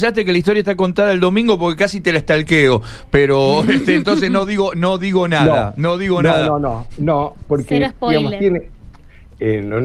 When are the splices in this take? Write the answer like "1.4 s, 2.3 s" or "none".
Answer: none